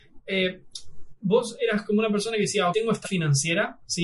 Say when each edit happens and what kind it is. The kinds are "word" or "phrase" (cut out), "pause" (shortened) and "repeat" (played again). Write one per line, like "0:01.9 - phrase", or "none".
0:02.7 - word
0:03.0 - word

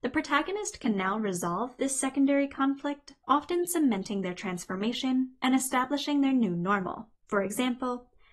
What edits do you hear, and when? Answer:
0:03.2 - pause
0:07.2 - pause

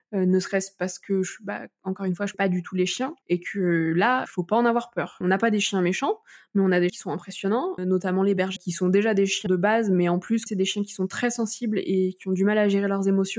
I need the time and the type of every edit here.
0:02.3 - word
0:04.3 - word
0:05.2 - word
0:06.9 - word
0:07.8 - word
0:08.6 - word
0:09.5 - word
0:10.5 - word

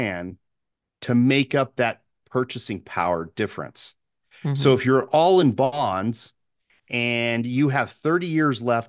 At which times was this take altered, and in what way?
none

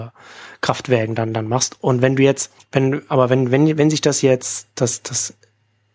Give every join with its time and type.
0:02.6 - pause

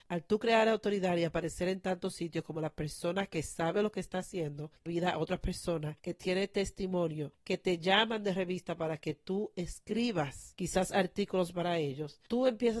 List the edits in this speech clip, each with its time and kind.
0:04.9 - phrase

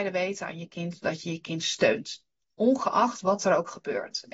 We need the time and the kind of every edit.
none

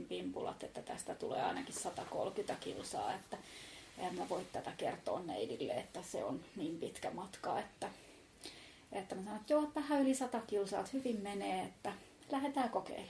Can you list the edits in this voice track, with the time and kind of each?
none

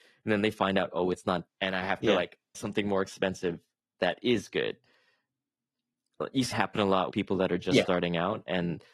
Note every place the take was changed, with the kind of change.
0:01.5 - word
0:02.5 - word
0:03.9 - word
0:06.5 - word
0:07.1 - word

